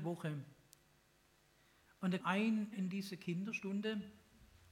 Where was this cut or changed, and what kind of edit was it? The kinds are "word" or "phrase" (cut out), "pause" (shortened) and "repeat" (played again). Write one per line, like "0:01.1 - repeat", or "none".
0:02.2 - word
0:02.7 - word